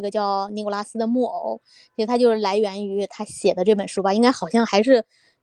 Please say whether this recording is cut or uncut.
uncut